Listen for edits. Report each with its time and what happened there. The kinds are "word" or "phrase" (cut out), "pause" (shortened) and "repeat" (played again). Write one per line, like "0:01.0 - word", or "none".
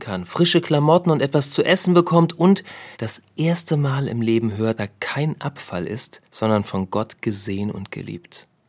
0:02.9 - pause
0:04.8 - word
0:06.2 - pause